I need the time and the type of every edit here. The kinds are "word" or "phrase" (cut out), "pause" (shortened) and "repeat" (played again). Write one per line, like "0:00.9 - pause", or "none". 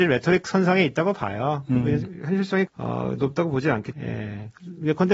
0:02.7 - word
0:03.9 - word